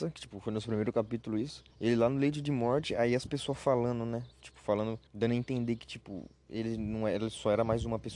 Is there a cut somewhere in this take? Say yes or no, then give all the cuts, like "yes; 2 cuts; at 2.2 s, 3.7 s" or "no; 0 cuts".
yes; 3 cuts; at 1.7 s, 4.3 s, 5.1 s